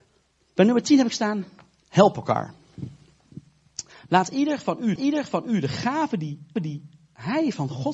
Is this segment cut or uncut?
cut